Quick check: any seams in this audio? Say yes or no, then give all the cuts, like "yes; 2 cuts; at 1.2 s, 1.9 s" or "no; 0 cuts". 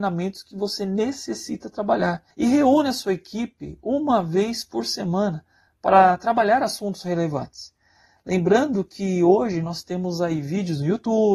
no; 0 cuts